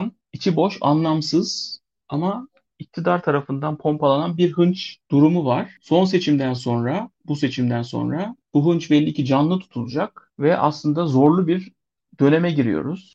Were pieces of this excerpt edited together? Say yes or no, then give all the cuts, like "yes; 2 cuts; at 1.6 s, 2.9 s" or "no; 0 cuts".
no; 0 cuts